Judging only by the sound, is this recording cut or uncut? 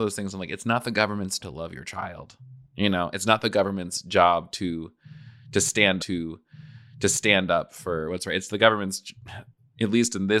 cut